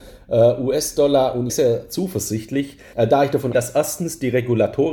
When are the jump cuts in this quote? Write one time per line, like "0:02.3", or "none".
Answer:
0:01.5
0:02.9
0:03.5